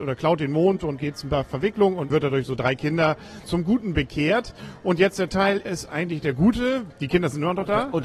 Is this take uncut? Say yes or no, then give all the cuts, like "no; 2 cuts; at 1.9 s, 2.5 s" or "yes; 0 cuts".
no; 6 cuts; at 1.0 s, 2.1 s, 3.4 s, 5.3 s, 5.6 s, 6.9 s